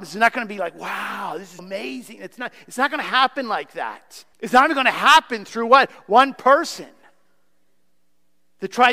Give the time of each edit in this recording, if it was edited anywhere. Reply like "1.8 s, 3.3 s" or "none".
1.6 s, 4.3 s